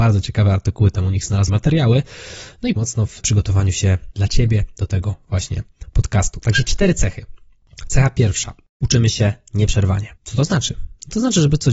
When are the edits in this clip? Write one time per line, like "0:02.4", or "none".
0:01.5
0:02.8
0:10.2